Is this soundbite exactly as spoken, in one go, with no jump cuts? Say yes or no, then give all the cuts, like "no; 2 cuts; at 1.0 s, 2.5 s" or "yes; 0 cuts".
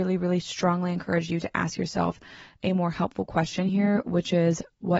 yes; 0 cuts